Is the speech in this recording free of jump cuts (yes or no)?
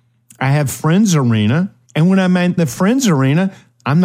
no